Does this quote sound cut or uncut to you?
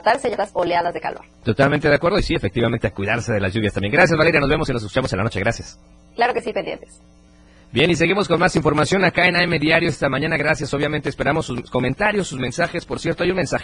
uncut